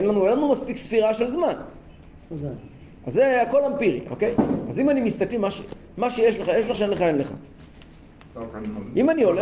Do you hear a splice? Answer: yes; 2 cuts; at 5.3 s, 6.7 s

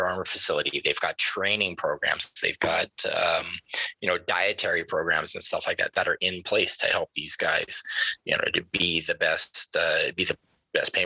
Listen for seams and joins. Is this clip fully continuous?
yes; 0 cuts

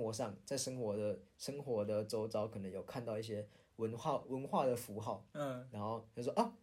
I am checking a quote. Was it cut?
no; 0 cuts

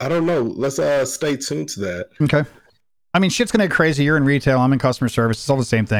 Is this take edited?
no; 0 cuts

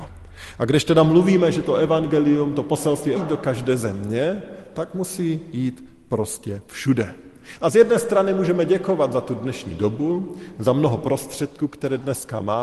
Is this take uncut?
no; 1 cut; at 3.2 s

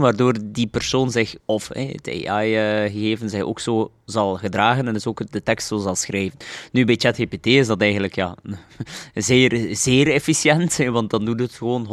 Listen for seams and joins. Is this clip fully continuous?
no; 1 cut; at 1.4 s

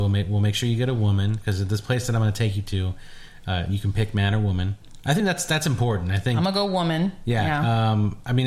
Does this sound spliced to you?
no; 0 cuts

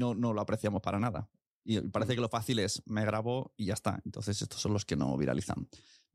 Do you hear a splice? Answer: no; 0 cuts

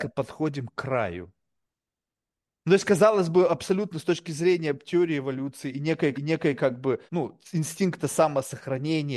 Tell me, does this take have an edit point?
yes; 2 cuts; at 6.1 s, 7.1 s

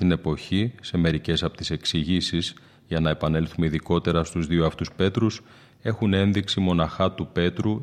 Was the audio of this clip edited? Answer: no; 0 cuts

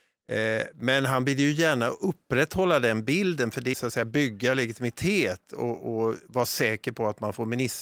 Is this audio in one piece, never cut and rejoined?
no; 1 cut; at 3.7 s

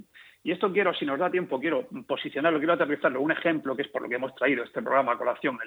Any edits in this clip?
no; 0 cuts

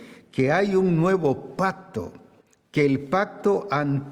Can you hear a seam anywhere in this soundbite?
no; 0 cuts

